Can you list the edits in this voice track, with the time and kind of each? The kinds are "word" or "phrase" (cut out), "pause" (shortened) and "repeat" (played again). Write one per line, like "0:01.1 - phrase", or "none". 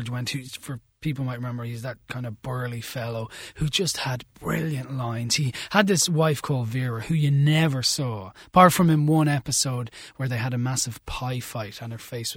0:04.3 - pause